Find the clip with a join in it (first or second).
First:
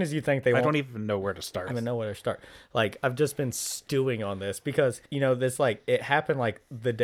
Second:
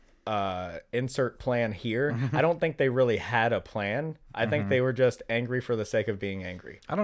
first